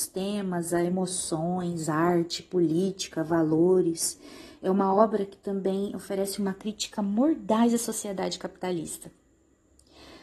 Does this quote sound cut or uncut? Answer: uncut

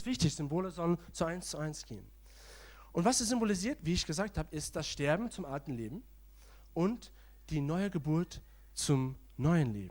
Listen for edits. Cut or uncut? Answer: uncut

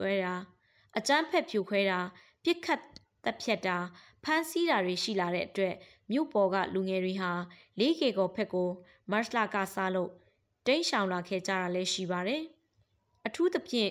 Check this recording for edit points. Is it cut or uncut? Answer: uncut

